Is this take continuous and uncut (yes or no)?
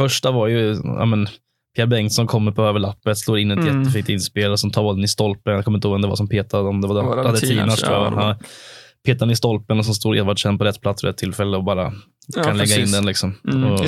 yes